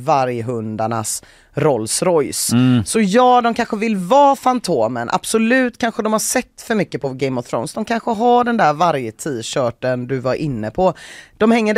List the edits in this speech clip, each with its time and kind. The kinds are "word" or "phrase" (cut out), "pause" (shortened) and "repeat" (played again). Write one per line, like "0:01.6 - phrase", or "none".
none